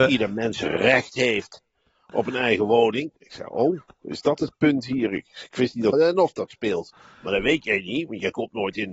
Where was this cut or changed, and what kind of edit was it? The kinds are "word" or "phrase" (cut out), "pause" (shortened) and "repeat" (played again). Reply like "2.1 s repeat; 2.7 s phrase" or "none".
3.2 s pause; 5.9 s word